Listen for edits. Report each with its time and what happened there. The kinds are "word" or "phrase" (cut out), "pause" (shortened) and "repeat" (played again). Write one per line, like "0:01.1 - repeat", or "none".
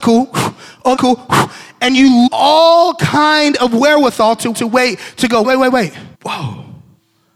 0:01.0 - word
0:02.3 - word
0:04.5 - repeat
0:05.4 - word
0:06.1 - pause